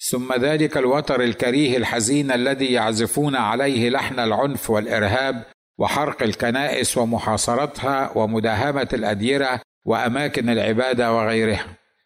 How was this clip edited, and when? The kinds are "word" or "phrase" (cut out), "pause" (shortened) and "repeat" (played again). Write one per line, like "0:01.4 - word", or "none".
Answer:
none